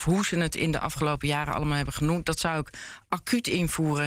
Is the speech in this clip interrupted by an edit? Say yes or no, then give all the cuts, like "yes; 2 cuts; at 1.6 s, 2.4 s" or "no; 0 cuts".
no; 0 cuts